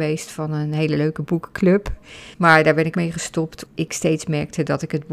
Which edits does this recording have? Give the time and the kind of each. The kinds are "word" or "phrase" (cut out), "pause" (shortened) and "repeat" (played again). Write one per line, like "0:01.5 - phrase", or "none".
0:02.3 - pause
0:02.9 - word
0:03.7 - word